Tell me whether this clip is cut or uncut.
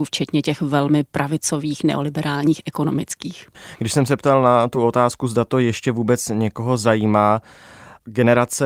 uncut